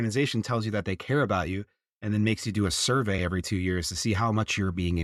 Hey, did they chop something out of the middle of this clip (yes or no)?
no